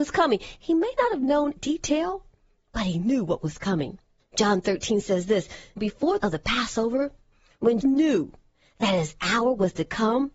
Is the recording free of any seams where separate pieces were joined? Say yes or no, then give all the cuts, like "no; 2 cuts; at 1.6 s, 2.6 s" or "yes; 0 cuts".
no; 4 cuts; at 1.6 s, 5.8 s, 6.2 s, 7.8 s